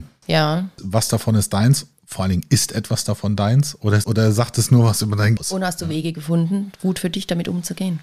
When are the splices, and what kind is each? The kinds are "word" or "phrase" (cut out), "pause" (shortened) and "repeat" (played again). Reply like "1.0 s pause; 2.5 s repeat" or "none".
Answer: 4.0 s word; 5.4 s word